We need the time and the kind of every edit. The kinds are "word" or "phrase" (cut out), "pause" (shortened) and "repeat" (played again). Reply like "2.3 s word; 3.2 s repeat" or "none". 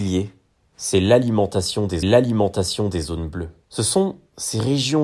2.0 s repeat; 3.6 s pause